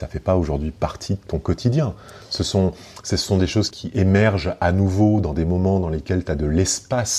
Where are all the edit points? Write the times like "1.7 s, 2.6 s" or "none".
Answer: 3.7 s